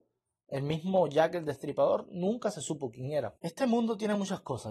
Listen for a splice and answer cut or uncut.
cut